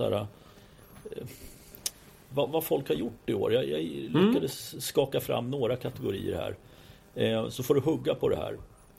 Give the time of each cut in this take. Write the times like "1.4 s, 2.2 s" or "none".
2.5 s